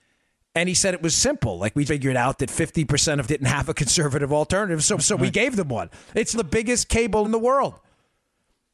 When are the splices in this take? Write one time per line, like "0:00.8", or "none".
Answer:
0:01.9
0:03.2
0:05.0
0:06.3
0:07.2